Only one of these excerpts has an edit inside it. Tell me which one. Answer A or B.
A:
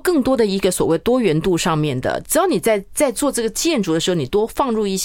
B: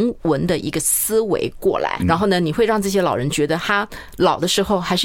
B